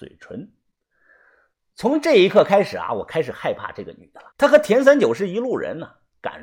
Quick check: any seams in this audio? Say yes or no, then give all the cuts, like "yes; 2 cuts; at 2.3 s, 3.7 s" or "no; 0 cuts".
yes; 1 cut; at 4.3 s